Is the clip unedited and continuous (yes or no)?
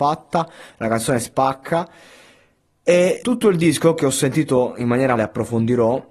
no